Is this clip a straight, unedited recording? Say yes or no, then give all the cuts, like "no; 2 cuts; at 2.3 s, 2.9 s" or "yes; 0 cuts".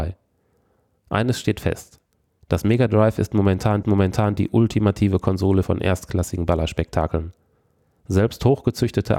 no; 2 cuts; at 3.8 s, 5.6 s